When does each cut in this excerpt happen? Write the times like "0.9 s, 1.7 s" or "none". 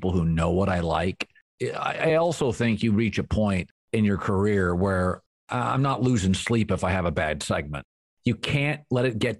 none

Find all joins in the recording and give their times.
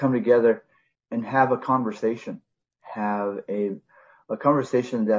none

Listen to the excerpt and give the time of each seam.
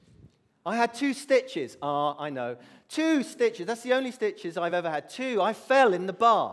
none

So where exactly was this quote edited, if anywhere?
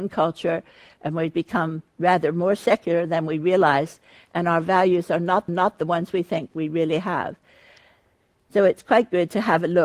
5.5 s

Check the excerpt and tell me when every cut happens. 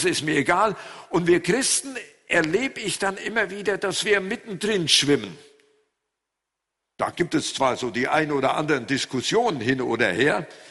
none

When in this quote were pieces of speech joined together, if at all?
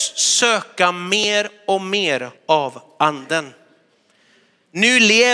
2.4 s

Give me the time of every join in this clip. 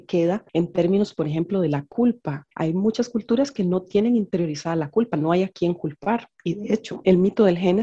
2.5 s

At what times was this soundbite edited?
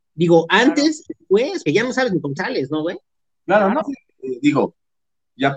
1.1 s, 1.7 s, 2.4 s, 3.8 s

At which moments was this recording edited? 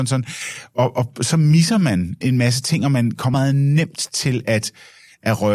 2.2 s, 3.3 s

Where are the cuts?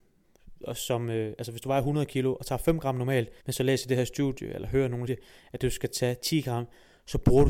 3.4 s, 5.1 s

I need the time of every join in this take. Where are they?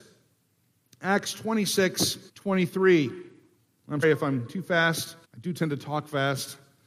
2.3 s, 4.0 s, 4.5 s, 5.2 s

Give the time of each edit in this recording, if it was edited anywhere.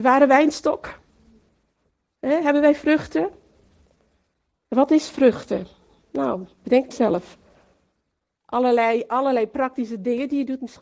6.9 s

